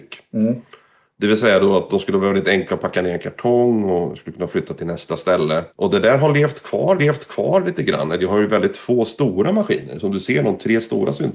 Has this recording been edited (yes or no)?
yes